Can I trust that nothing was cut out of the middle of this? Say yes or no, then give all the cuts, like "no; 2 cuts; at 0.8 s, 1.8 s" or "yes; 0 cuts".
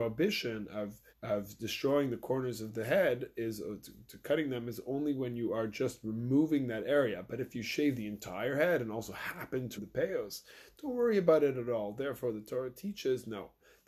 no; 2 cuts; at 1.1 s, 9.8 s